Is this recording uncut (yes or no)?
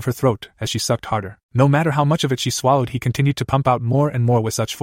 no